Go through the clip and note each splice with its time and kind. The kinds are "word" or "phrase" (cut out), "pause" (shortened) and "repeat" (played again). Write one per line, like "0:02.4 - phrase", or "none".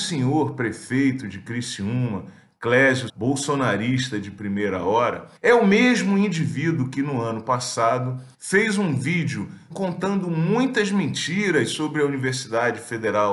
0:03.1 - word
0:05.4 - pause
0:08.3 - pause
0:09.7 - word

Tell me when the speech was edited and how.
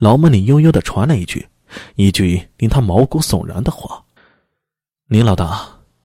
0:04.2 - pause

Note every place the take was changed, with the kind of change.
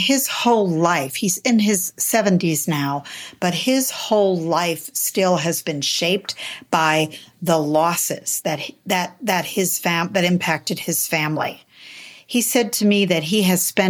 none

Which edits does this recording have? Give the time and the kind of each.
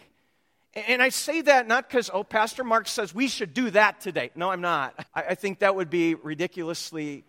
0:05.1 - word

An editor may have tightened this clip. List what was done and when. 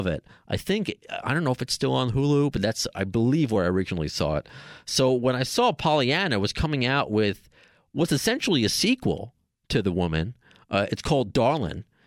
none

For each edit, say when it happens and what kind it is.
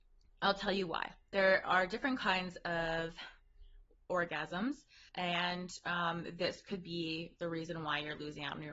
0:05.1 - pause

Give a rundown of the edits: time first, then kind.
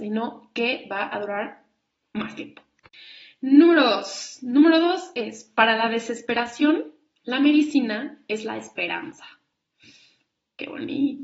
none

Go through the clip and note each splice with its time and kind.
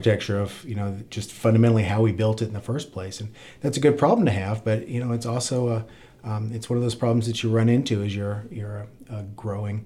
none

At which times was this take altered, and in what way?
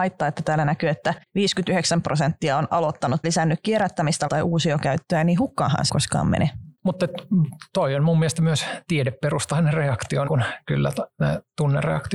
0:01.2 - pause
0:03.2 - word
0:04.3 - word
0:05.9 - word
0:06.7 - pause
0:10.3 - word

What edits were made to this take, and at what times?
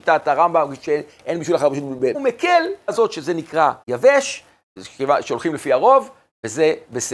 0:02.1 - phrase
0:02.9 - word
0:03.8 - pause

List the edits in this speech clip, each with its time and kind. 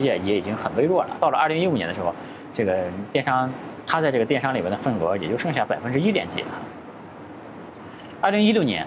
0:01.2 - word

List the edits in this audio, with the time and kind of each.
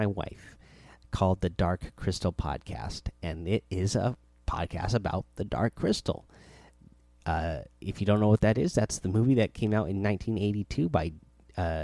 none

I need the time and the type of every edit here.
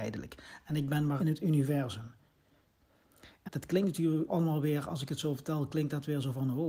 0:01.2 - phrase
0:03.5 - word
0:04.3 - word

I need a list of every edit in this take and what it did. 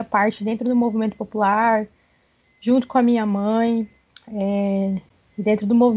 none

